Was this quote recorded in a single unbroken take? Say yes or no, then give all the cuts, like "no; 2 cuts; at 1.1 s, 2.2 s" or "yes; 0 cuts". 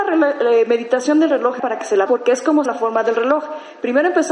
no; 3 cuts; at 1.6 s, 2.1 s, 2.7 s